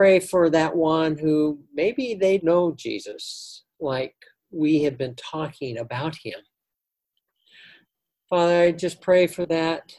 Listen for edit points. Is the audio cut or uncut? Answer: cut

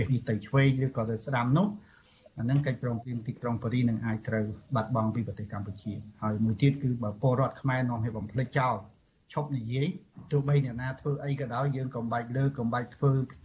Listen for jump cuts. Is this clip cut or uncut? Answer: uncut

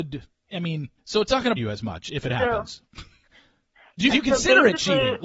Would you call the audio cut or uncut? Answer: cut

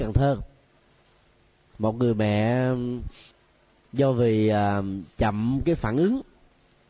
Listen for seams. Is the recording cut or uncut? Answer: cut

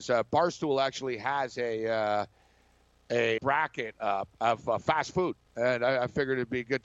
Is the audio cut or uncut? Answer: cut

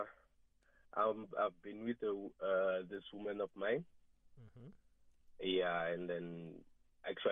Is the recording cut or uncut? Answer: uncut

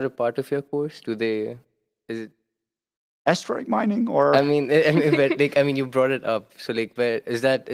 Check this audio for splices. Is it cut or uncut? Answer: uncut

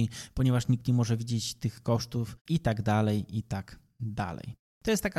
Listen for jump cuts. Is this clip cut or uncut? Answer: cut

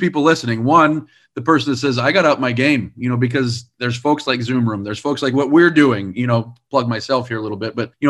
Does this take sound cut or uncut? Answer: uncut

